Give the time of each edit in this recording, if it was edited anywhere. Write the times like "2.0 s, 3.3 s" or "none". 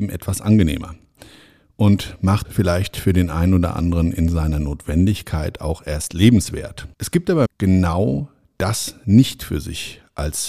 2.4 s, 6.9 s, 7.5 s